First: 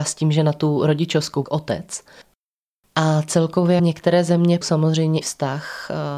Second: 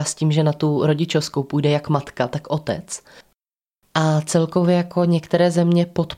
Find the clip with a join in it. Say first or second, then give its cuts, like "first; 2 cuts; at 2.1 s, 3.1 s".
first; 4 cuts; at 1.4 s, 3.8 s, 4.6 s, 5.2 s